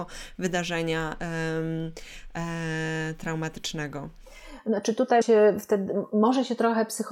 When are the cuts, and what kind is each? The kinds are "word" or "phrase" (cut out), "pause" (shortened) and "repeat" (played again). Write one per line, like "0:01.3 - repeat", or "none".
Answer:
0:05.2 - word